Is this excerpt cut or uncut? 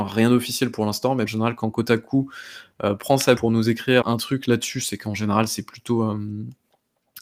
cut